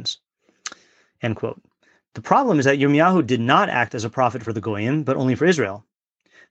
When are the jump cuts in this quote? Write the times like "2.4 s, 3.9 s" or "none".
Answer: none